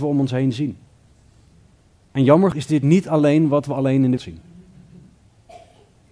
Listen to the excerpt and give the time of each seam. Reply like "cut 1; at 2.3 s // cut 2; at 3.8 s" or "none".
cut 1; at 2.5 s // cut 2; at 4.2 s

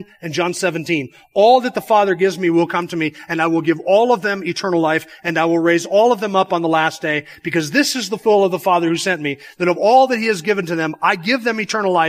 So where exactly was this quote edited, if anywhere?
none

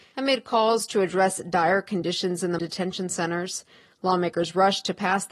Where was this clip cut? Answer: cut 1; at 2.6 s

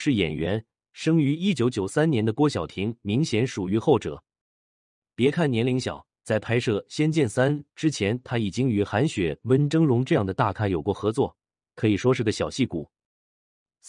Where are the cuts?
cut 1; at 6.1 s

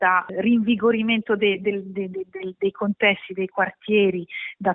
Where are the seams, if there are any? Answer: none

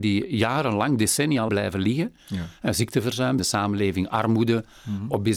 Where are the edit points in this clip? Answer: cut 1; at 1.5 s // cut 2; at 3.4 s

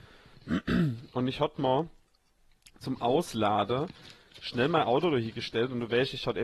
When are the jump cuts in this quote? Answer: none

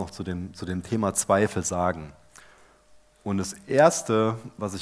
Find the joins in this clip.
none

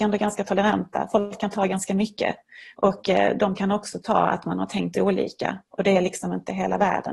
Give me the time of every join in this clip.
none

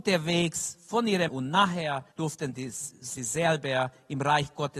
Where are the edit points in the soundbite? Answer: cut 1; at 1.3 s // cut 2; at 2.1 s // cut 3; at 3.2 s

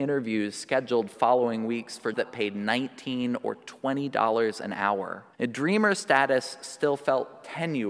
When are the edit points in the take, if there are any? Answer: cut 1; at 1.1 s // cut 2; at 2.1 s // cut 3; at 5.3 s

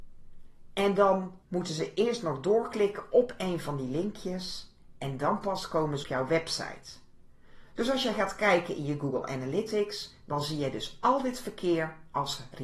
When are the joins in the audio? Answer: cut 1; at 1.4 s // cut 2; at 6.0 s

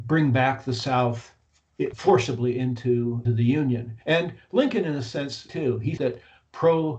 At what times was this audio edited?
cut 1; at 1.9 s // cut 2; at 3.2 s // cut 3; at 4.0 s // cut 4; at 5.5 s // cut 5; at 6.0 s

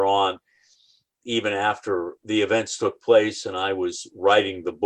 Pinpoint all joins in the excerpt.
cut 1; at 2.2 s

